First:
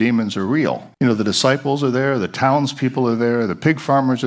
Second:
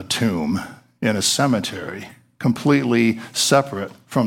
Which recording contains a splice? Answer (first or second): first